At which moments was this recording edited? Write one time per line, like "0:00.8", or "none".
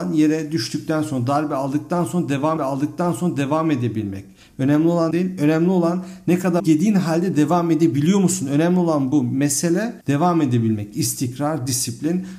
0:02.6
0:05.1
0:06.6
0:10.0

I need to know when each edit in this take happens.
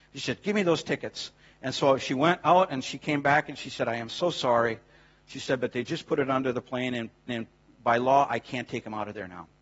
0:07.3

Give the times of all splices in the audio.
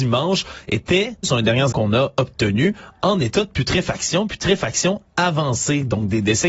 0:01.2
0:01.7

